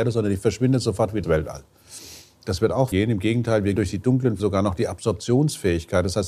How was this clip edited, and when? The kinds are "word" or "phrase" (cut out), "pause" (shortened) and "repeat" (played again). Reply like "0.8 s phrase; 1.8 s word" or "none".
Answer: 1.2 s word; 2.9 s word; 3.8 s word; 4.4 s word